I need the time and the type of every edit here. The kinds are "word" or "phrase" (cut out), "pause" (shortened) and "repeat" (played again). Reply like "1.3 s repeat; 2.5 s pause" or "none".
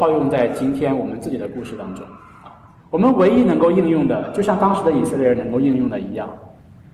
2.8 s pause